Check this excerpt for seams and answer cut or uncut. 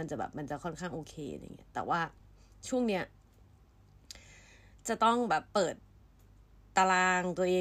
uncut